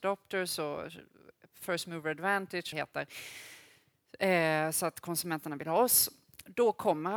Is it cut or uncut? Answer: cut